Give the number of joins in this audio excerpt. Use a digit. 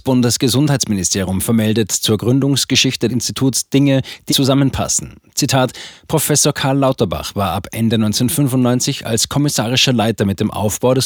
2